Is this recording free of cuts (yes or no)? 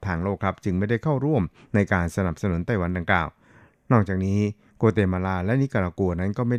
yes